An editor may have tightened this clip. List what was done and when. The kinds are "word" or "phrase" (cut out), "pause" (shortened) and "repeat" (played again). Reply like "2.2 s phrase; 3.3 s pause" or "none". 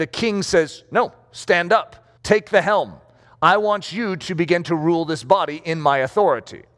2.2 s pause